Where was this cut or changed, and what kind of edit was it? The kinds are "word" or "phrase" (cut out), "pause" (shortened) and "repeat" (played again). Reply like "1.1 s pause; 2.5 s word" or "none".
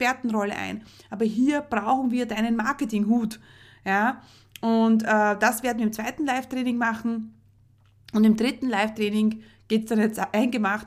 none